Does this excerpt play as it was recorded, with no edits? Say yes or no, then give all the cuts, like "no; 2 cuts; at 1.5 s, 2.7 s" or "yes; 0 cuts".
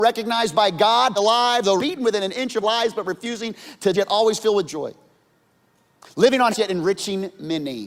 no; 6 cuts; at 1.2 s, 1.8 s, 2.6 s, 3.9 s, 4.7 s, 6.5 s